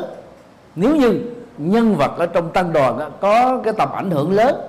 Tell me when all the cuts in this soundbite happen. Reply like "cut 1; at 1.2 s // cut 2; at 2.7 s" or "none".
cut 1; at 1.6 s